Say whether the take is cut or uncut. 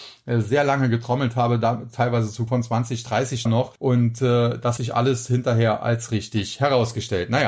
cut